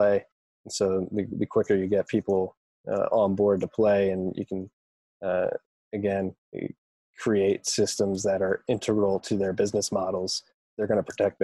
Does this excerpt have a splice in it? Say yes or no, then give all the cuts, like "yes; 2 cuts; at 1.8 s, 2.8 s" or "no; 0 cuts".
no; 0 cuts